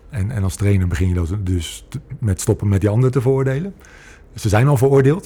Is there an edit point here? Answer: no; 0 cuts

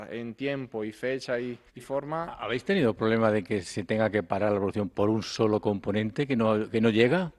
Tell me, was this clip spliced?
yes; 1 cut; at 1.7 s

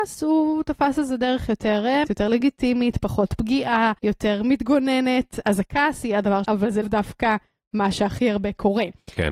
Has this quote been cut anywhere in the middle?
yes; 5 cuts; at 2.1 s, 4.0 s, 5.4 s, 6.4 s, 6.8 s

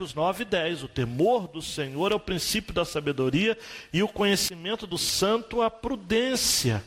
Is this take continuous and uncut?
yes; 0 cuts

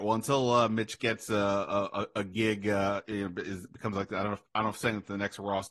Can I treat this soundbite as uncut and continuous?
yes; 0 cuts

